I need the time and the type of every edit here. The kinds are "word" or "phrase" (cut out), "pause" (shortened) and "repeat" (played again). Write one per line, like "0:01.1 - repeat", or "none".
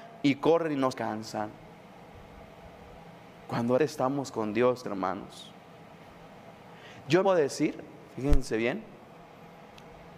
0:00.9 - word
0:03.8 - word
0:04.8 - word
0:07.2 - word